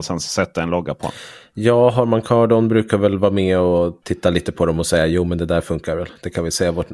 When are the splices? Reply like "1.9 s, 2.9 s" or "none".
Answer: 4.0 s